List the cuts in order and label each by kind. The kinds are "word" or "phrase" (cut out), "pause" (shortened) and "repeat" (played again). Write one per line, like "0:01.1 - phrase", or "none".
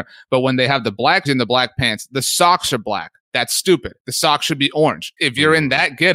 0:01.3 - word
0:05.2 - word